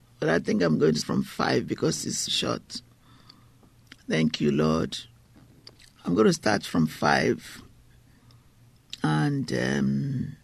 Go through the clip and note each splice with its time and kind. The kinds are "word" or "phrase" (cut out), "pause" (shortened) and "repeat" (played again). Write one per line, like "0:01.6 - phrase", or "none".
0:01.0 - word
0:02.3 - word
0:05.8 - pause

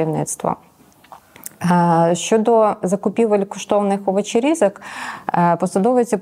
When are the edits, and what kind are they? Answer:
none

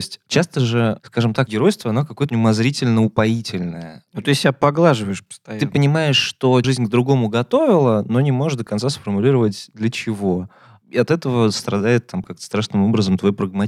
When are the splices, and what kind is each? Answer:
0:01.5 - word
0:02.3 - word
0:06.6 - word

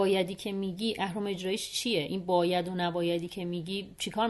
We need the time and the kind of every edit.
none

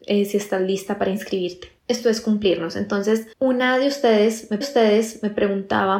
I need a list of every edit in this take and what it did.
0:01.8 - pause
0:03.3 - pause
0:04.6 - repeat

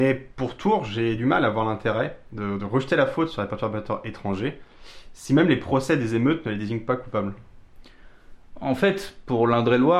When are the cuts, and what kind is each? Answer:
none

